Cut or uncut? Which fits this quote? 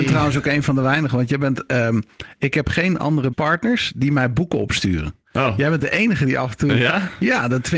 cut